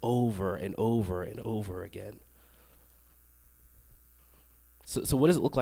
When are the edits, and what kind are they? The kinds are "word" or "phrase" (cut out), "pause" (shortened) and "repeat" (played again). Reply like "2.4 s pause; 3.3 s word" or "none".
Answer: none